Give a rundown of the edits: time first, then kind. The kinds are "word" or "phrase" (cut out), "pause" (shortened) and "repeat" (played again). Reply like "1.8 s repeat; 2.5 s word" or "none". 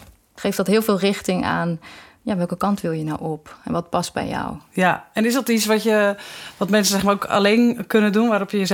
none